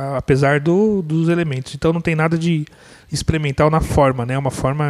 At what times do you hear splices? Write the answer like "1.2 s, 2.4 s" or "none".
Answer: none